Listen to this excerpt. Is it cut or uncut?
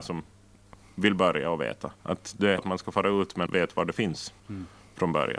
cut